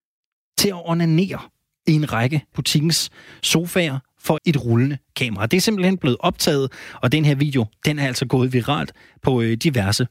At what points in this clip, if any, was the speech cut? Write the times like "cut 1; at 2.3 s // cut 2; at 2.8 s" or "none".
cut 1; at 2.5 s // cut 2; at 4.4 s